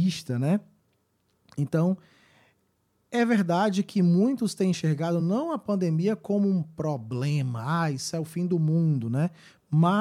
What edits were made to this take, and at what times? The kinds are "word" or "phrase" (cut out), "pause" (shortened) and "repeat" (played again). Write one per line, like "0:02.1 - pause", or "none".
none